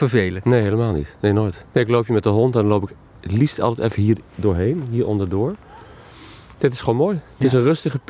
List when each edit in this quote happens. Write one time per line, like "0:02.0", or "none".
0:01.7
0:04.3